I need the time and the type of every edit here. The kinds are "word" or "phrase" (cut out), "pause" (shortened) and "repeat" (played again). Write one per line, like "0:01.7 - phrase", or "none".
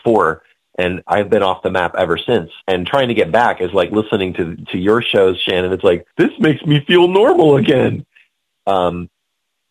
0:02.6 - pause
0:06.1 - pause